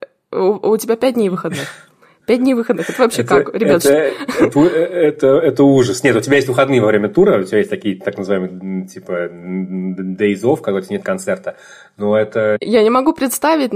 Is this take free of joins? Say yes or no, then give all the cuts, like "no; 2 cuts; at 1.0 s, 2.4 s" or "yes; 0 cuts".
yes; 0 cuts